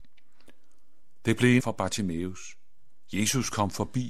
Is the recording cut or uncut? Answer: cut